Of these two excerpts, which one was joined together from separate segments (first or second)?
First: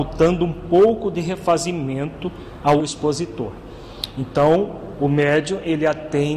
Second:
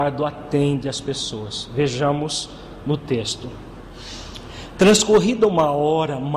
first